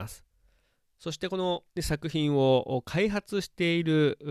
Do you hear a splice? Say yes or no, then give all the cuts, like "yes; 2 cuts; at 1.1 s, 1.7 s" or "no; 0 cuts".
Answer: yes; 1 cut; at 1.7 s